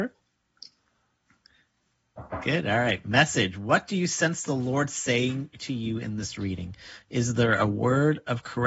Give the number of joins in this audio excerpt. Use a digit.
0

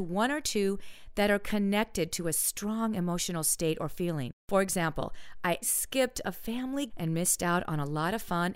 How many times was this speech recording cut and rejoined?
2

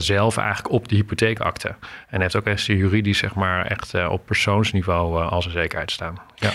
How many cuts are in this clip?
0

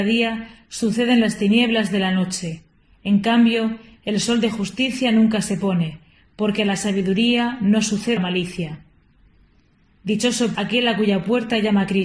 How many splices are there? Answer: 2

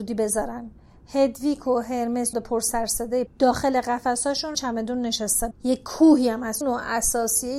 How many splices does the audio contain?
5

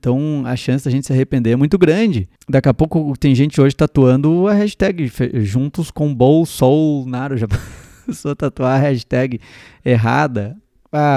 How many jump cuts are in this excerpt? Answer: 0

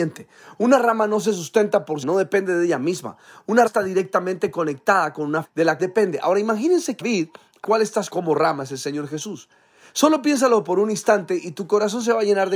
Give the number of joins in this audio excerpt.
7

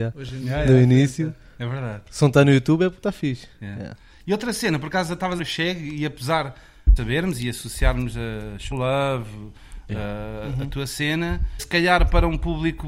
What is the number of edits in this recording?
4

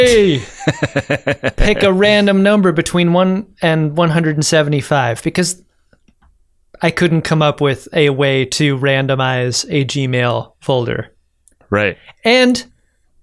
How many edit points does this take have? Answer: 0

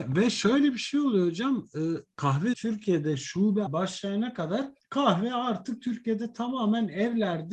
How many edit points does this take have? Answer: 3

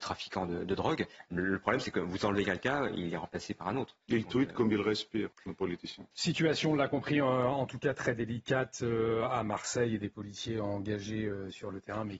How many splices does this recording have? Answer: 3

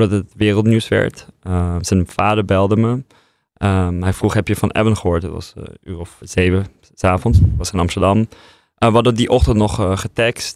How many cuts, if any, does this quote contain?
1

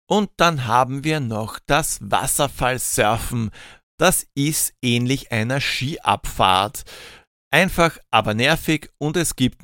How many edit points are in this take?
0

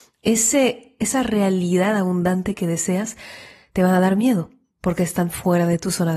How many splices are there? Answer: 0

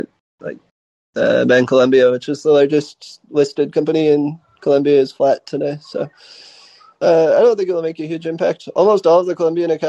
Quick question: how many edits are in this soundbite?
0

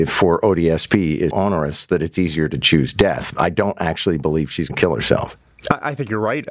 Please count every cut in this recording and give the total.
2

